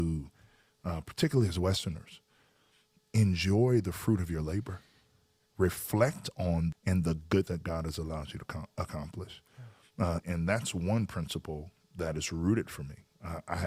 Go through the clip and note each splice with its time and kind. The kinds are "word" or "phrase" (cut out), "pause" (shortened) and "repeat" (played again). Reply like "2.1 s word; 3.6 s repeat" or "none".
6.7 s word; 7.5 s word; 10.2 s word